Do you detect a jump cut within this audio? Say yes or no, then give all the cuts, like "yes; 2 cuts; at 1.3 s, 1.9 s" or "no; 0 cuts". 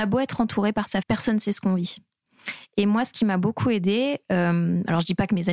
yes; 1 cut; at 1.0 s